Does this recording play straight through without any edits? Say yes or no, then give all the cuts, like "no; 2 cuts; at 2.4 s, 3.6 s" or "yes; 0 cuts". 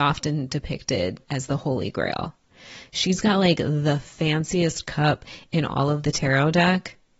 no; 1 cut; at 1.2 s